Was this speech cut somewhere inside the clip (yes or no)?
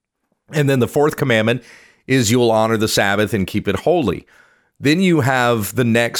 no